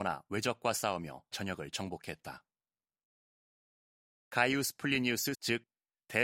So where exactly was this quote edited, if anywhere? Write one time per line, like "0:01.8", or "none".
0:01.3
0:05.3